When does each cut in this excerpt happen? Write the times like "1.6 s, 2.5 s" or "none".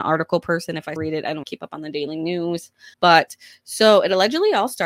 1.0 s, 1.4 s, 2.9 s